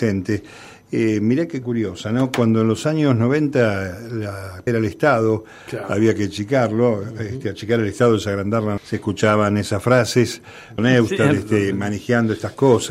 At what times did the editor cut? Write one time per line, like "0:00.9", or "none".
0:01.6
0:04.7
0:08.8
0:10.8